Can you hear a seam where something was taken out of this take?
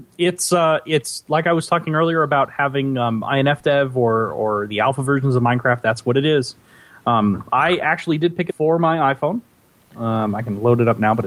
yes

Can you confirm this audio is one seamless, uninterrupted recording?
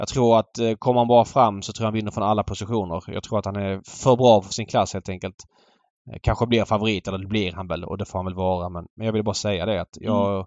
yes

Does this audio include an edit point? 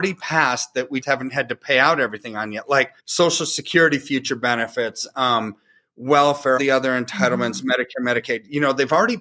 yes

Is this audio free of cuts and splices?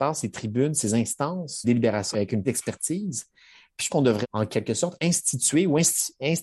no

